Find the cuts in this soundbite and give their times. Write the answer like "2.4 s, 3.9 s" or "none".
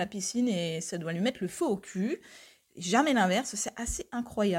none